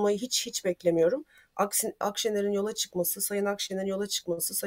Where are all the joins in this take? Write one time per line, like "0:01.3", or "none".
0:02.0